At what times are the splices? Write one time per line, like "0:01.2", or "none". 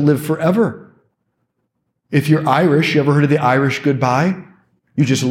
none